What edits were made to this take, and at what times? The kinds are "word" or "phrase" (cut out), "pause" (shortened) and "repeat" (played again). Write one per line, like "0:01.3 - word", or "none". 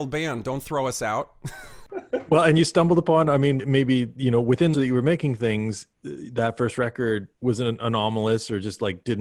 0:03.6 - word
0:04.7 - phrase
0:05.9 - pause
0:07.3 - pause